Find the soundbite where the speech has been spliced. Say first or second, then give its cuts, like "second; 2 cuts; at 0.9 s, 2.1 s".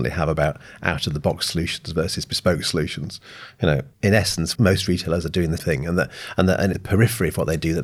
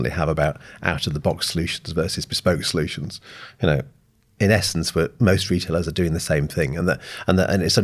first; 4 cuts; at 3.9 s, 4.6 s, 5.6 s, 6.7 s